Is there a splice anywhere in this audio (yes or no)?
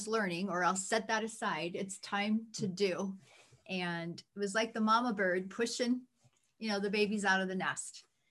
no